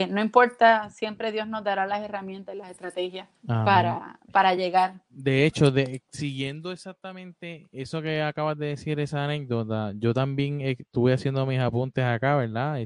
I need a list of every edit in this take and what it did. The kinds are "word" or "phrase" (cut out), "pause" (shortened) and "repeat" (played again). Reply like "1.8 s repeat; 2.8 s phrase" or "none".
3.4 s pause